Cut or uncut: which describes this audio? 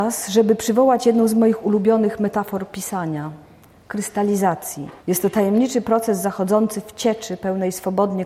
cut